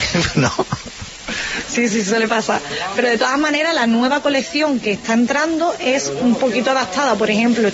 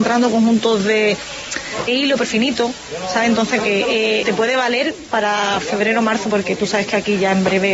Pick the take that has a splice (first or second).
second